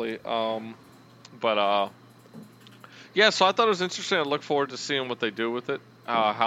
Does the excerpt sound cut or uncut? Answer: uncut